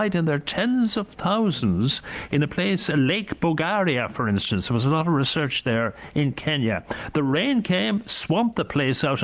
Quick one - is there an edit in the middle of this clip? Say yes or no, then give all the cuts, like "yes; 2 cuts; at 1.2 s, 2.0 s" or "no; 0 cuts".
no; 0 cuts